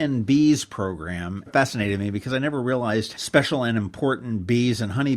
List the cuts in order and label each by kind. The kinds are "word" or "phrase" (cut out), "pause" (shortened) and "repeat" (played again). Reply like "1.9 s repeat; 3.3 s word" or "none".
1.5 s phrase; 3.1 s word